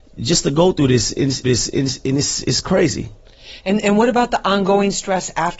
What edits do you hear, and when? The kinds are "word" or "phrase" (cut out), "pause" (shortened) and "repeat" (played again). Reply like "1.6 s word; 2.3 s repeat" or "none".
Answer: 1.4 s repeat